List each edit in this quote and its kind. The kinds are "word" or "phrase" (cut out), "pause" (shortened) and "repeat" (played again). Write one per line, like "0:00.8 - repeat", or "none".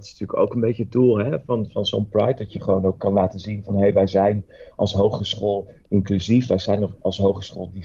none